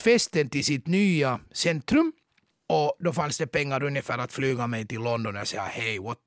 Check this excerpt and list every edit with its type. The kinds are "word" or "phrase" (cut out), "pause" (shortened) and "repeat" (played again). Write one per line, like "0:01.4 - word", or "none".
none